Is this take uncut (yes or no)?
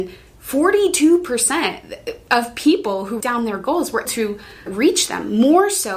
no